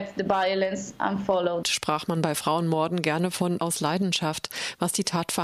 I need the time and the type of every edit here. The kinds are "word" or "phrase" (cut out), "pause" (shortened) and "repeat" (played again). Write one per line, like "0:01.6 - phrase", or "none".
0:01.6 - phrase
0:03.6 - word